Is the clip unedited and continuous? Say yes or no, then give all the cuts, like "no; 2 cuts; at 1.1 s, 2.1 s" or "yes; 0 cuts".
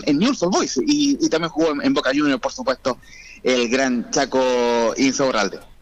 yes; 0 cuts